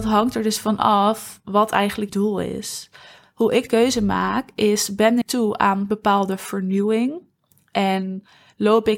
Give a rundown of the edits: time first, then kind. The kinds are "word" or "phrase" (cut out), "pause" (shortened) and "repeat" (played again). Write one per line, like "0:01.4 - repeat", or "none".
0:02.1 - word
0:03.7 - word
0:05.2 - word